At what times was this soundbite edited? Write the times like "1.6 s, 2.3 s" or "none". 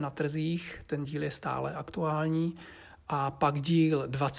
none

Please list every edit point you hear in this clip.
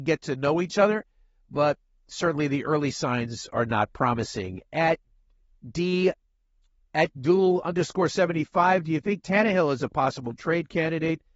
none

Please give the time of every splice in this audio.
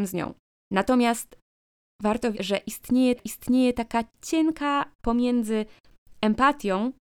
2.3 s, 3.2 s, 5.0 s

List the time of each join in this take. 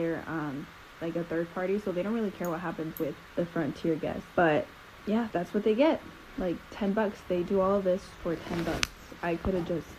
3.3 s, 4.3 s, 5.3 s

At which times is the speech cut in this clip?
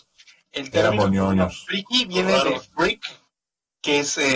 none

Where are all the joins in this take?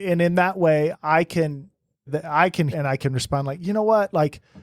0.9 s, 2.1 s, 2.7 s

